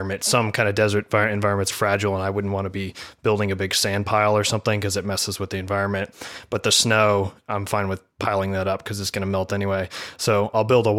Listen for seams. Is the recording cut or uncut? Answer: cut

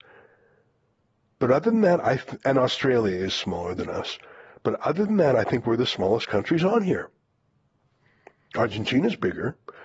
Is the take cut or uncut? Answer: uncut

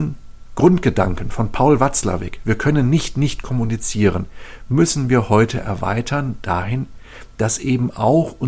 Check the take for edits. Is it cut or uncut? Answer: uncut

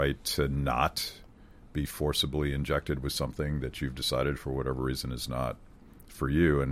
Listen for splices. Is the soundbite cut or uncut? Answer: uncut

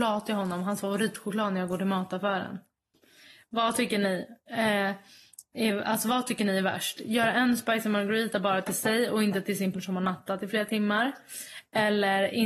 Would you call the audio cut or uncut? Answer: cut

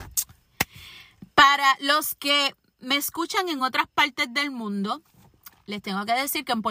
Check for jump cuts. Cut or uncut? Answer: uncut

